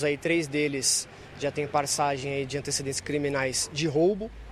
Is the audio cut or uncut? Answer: uncut